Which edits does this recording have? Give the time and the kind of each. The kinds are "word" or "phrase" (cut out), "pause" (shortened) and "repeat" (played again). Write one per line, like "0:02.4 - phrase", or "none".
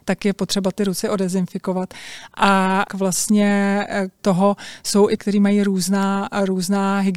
0:01.0 - word
0:02.9 - word
0:04.2 - word
0:05.2 - word